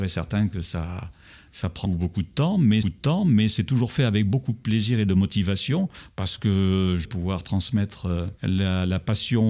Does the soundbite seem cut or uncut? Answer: cut